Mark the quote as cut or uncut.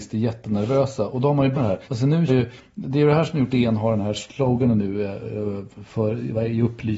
cut